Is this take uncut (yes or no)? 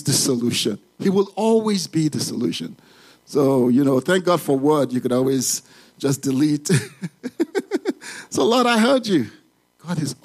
yes